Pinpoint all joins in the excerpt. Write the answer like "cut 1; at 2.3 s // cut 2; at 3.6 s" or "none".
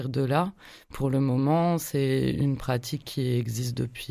none